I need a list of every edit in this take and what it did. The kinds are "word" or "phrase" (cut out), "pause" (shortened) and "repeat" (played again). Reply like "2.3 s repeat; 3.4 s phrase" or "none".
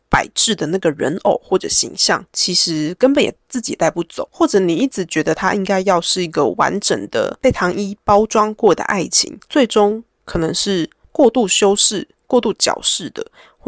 9.4 s pause